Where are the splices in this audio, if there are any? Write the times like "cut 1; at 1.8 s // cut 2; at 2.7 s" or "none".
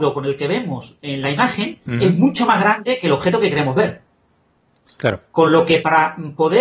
none